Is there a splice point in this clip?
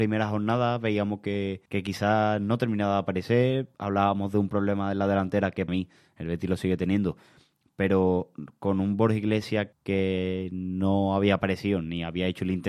yes; 4 cuts; at 1.7 s, 3.7 s, 5.7 s, 9.7 s

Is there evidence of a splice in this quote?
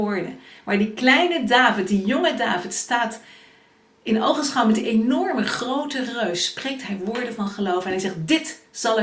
no; 0 cuts

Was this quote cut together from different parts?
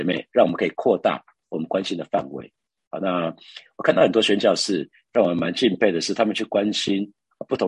no; 0 cuts

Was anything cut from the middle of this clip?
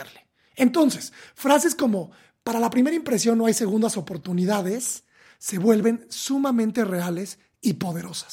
no; 0 cuts

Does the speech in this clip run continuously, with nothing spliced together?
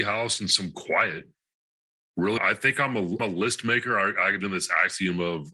no; 3 cuts; at 2.4 s, 3.2 s, 4.4 s

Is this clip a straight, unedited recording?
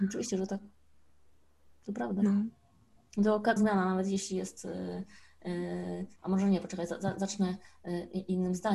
no; 2 cuts; at 3.6 s, 6.2 s

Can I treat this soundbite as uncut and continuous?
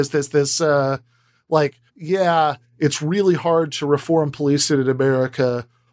no; 1 cut; at 1.9 s

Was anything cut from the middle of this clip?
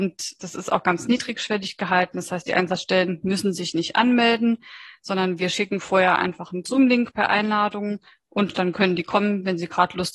no; 0 cuts

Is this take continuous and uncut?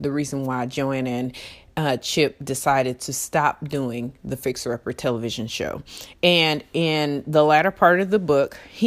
yes; 0 cuts

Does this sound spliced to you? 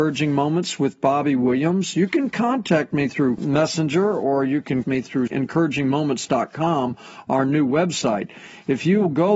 yes; 1 cut; at 4.8 s

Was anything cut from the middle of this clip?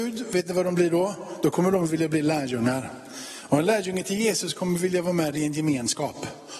no; 0 cuts

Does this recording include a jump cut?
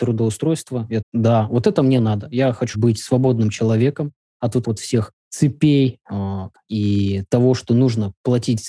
yes; 5 cuts; at 1.0 s, 2.7 s, 4.6 s, 5.2 s, 6.6 s

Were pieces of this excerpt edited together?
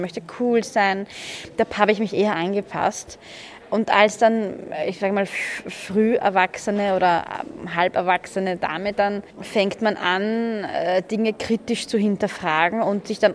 yes; 1 cut; at 9.3 s

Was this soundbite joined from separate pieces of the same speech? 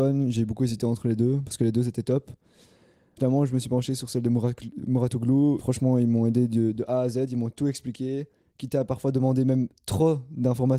no; 0 cuts

